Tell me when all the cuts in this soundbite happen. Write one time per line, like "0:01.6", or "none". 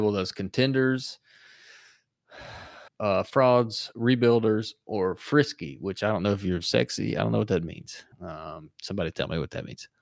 0:02.9
0:08.1